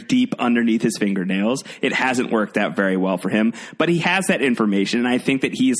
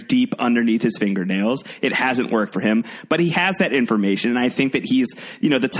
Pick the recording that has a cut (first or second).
second